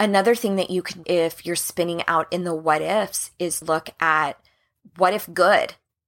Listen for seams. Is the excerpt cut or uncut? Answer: cut